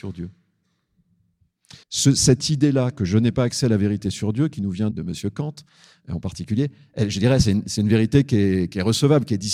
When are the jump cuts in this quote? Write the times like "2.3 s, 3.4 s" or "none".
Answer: 1.8 s, 4.9 s